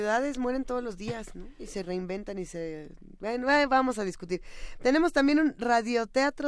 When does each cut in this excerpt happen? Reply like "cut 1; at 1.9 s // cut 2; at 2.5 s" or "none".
none